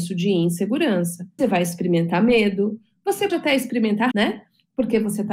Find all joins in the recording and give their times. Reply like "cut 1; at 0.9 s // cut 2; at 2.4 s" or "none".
cut 1; at 1.4 s // cut 2; at 3.3 s // cut 3; at 4.1 s